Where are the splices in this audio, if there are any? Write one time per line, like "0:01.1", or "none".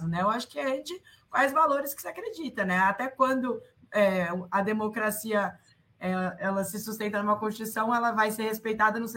none